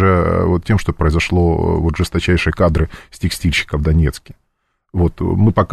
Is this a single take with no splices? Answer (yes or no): yes